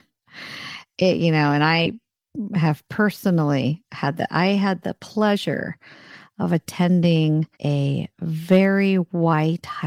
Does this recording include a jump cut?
yes; 1 cut; at 7.5 s

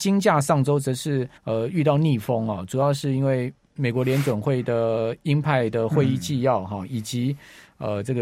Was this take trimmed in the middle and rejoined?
yes; 1 cut; at 1.4 s

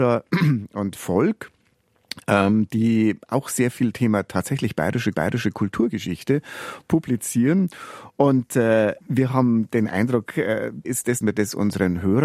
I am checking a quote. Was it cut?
yes; 6 cuts; at 1.0 s, 3.9 s, 5.1 s, 9.0 s, 10.8 s, 11.2 s

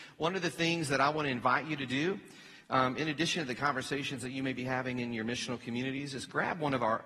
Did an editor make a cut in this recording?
no; 0 cuts

